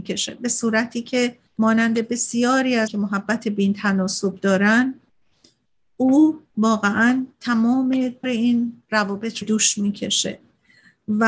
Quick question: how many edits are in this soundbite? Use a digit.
5